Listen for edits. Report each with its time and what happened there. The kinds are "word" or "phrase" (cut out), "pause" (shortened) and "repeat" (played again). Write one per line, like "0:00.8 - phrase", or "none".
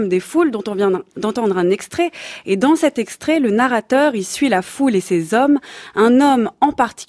none